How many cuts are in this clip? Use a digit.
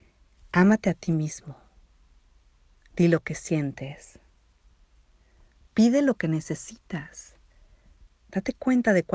0